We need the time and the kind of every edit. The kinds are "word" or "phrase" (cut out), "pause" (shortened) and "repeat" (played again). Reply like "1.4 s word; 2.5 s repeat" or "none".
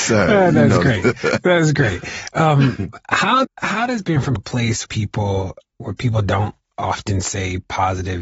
3.4 s word; 4.4 s word; 4.8 s word; 5.6 s word